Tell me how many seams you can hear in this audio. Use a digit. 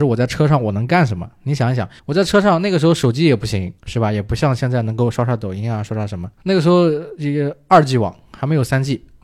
3